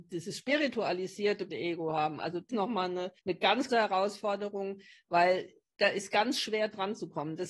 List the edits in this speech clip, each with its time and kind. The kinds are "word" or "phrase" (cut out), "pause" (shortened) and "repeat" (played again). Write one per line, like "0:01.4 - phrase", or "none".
0:01.5 - word
0:02.5 - phrase
0:03.2 - pause
0:03.7 - word